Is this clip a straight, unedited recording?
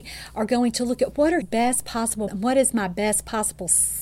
no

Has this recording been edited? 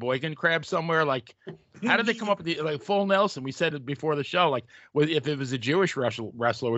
no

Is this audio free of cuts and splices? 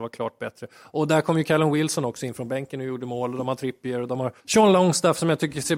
no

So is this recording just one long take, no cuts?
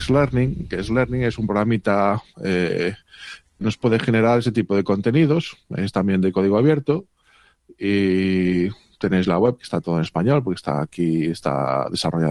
no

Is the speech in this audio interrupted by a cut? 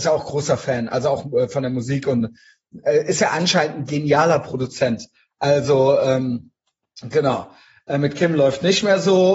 no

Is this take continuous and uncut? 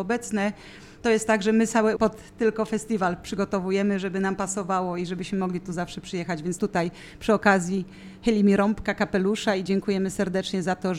no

